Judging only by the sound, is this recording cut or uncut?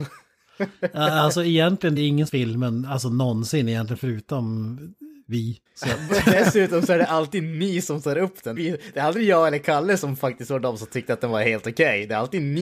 cut